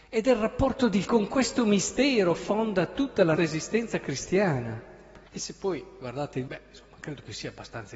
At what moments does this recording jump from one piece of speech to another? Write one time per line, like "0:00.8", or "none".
0:01.0
0:02.4
0:03.4
0:05.3
0:06.5